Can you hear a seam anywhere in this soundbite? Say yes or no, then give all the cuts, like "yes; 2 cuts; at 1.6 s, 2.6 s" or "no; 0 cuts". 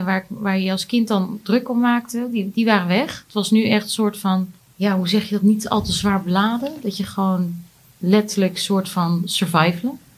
no; 0 cuts